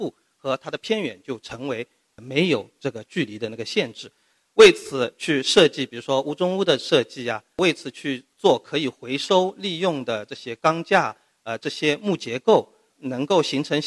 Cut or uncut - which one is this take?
uncut